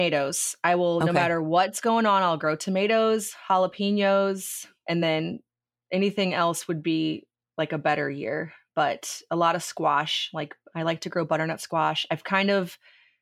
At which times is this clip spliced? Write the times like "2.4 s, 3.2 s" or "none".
none